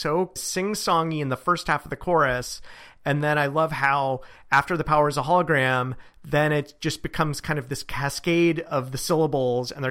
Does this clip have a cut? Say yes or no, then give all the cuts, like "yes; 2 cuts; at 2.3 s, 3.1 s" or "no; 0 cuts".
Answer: no; 0 cuts